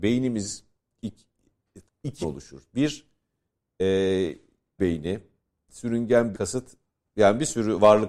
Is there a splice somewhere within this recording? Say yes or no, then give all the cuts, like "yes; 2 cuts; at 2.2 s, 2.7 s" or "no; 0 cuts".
yes; 4 cuts; at 1.9 s, 2.2 s, 4.8 s, 6.3 s